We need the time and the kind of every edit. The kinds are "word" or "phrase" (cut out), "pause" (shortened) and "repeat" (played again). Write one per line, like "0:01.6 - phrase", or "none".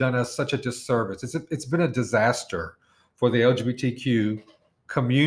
none

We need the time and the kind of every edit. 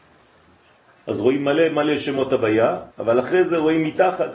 0:02.9 - pause

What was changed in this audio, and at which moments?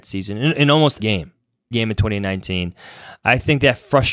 0:01.0 - word
0:01.7 - word

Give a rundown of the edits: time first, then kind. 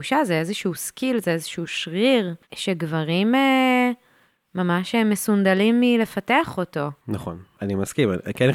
0:02.4 - pause
0:07.0 - pause

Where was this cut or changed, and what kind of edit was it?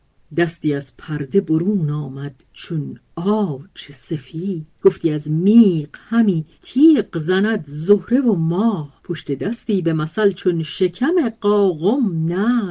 0:02.5 - pause
0:04.7 - pause
0:06.5 - pause
0:09.0 - pause

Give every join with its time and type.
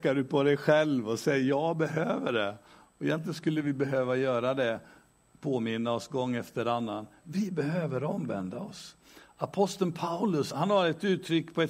0:10.5 - word

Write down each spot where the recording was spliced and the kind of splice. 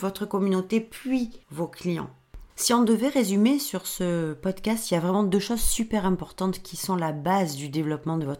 0:01.4 - pause
0:02.5 - pause

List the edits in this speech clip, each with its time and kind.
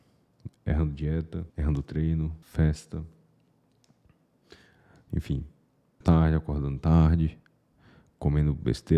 0:01.5 - pause
0:02.4 - pause
0:06.0 - word

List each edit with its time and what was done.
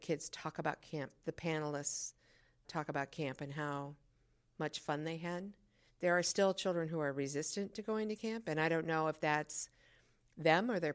none

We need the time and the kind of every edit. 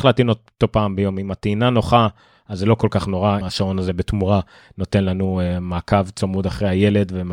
0:03.4 - word

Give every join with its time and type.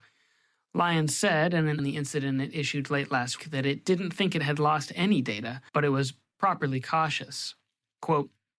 0:01.8 - phrase
0:03.4 - word
0:05.7 - pause

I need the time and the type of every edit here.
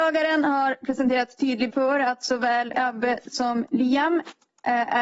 0:01.7 - word
0:02.7 - word

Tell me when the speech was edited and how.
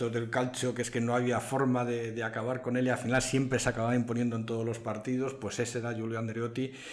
none

